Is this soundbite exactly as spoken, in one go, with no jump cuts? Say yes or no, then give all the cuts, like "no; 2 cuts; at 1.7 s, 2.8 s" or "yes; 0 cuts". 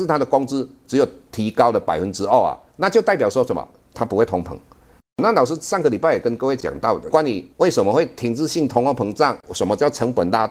no; 2 cuts; at 7.5 s, 9.4 s